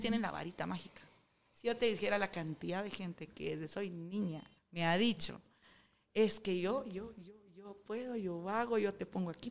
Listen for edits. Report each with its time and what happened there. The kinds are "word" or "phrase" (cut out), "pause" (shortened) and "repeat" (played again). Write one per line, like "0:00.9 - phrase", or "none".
0:04.6 - pause